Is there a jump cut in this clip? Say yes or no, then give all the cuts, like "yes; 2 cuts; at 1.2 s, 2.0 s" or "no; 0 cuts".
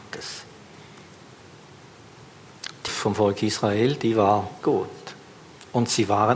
yes; 2 cuts; at 2.9 s, 4.6 s